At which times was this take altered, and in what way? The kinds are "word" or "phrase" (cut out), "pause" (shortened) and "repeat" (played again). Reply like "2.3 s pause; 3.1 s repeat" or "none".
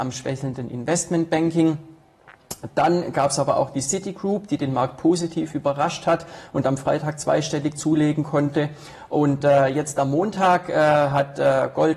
none